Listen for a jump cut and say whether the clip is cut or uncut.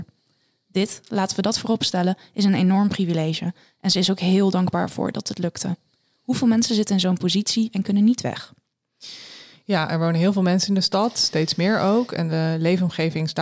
uncut